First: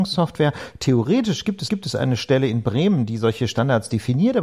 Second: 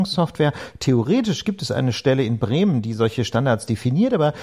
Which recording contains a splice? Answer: first; 1 cut; at 1.7 s

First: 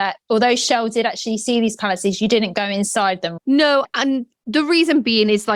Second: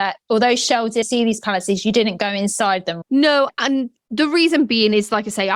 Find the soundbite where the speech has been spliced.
second; 1 cut; at 1.0 s

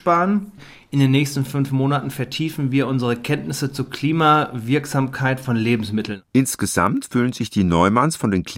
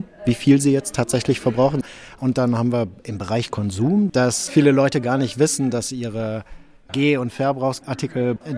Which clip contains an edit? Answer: first; 1 cut; at 6.3 s

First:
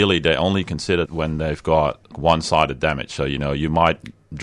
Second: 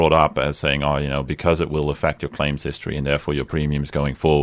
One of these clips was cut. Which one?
first; 2 cuts; at 1.1 s, 2.1 s

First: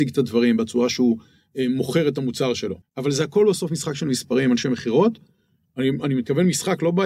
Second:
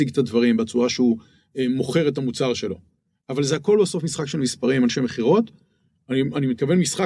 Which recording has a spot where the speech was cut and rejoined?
first; 1 cut; at 2.8 s

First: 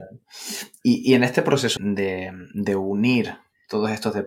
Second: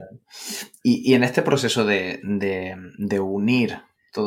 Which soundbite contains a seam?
first; 1 cut; at 1.8 s

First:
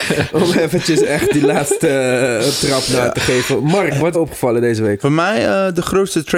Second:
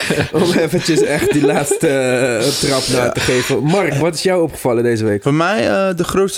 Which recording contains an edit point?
first; 1 cut; at 4.1 s

